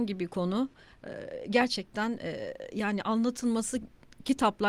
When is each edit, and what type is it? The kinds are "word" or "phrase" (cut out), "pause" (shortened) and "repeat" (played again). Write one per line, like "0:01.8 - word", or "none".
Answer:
none